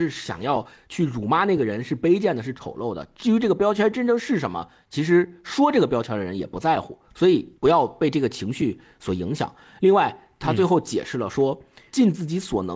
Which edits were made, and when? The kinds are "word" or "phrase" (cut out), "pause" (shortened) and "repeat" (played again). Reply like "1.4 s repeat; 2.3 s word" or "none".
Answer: 7.6 s pause